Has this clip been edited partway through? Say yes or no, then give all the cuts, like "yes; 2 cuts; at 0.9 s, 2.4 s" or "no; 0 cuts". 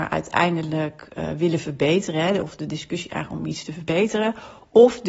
no; 0 cuts